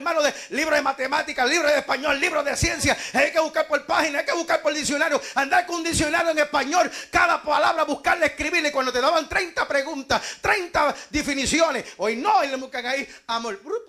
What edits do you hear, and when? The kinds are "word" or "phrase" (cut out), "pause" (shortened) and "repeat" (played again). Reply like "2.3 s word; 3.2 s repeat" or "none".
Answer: 12.6 s word